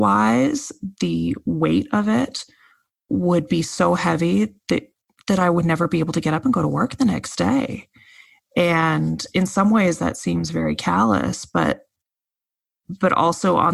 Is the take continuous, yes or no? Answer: yes